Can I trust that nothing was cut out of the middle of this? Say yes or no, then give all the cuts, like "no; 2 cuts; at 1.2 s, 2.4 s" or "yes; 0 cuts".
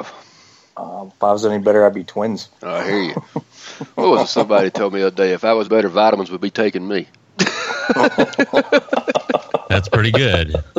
no; 2 cuts; at 2.6 s, 5.6 s